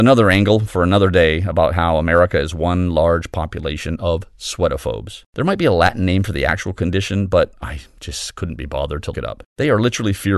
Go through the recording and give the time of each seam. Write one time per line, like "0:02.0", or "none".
0:05.3
0:09.1
0:09.5